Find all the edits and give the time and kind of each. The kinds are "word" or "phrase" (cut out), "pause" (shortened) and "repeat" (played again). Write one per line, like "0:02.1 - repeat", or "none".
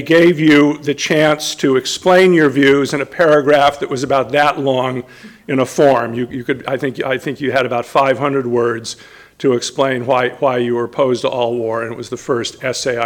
none

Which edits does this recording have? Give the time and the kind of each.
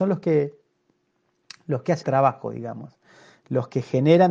0:02.0 - word

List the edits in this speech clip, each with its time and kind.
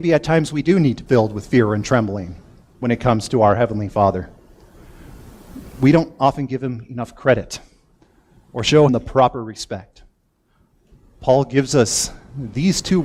0:01.1 - word
0:08.9 - word

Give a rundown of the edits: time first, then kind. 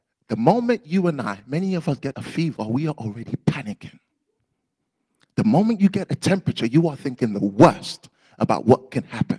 0:02.1 - word

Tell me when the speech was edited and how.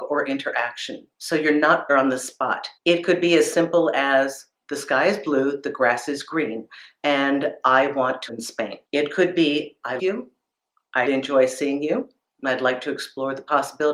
0:01.9 - phrase
0:02.8 - pause
0:08.3 - word
0:08.9 - pause
0:10.0 - word
0:11.1 - word

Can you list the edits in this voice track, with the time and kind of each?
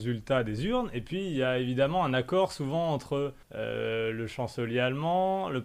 0:03.4 - pause

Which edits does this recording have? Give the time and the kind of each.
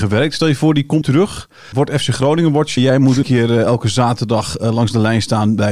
0:01.0 - word
0:01.7 - word
0:02.8 - word
0:03.2 - word

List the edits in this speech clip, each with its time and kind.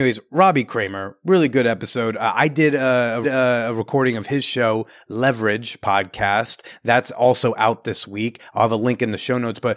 0:03.2 - repeat

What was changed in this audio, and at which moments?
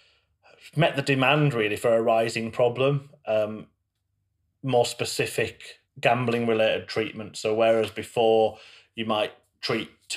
0:05.9 - pause

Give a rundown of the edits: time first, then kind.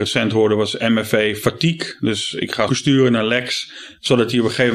0:02.7 - phrase

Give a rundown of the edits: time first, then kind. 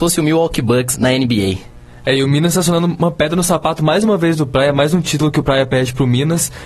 0:00.9 - word

